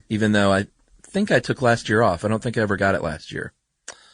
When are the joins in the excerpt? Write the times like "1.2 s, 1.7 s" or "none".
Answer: none